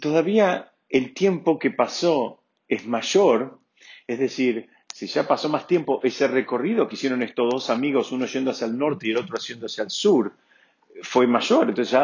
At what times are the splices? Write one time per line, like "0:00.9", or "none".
none